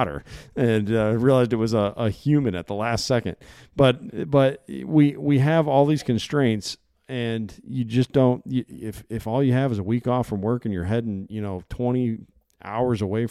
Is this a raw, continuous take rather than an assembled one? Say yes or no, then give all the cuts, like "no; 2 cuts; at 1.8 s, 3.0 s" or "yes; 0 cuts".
yes; 0 cuts